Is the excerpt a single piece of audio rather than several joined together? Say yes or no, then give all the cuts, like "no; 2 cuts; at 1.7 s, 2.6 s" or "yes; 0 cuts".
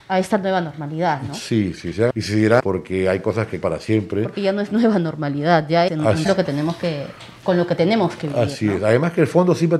no; 6 cuts; at 1.8 s, 2.1 s, 2.6 s, 3.6 s, 5.9 s, 6.2 s